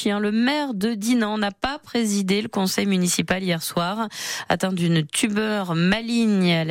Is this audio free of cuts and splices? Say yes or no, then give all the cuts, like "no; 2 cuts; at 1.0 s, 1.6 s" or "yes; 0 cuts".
yes; 0 cuts